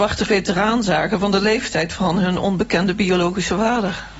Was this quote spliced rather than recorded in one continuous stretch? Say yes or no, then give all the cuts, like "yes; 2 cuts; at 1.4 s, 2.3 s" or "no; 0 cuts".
no; 0 cuts